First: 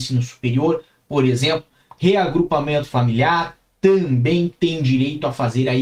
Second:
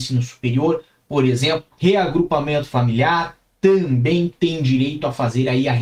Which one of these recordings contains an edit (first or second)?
second